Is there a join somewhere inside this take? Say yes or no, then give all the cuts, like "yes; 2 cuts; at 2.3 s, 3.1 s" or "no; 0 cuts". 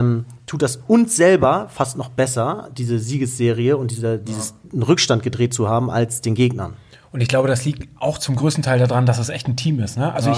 no; 0 cuts